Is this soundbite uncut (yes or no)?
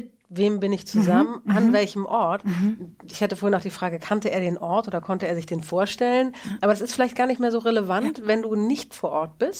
yes